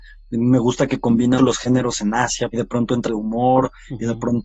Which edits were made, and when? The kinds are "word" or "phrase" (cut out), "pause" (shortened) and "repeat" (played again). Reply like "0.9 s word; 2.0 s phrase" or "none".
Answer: 1.4 s word; 2.5 s phrase; 3.1 s word